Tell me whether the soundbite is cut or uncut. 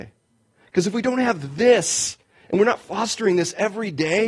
uncut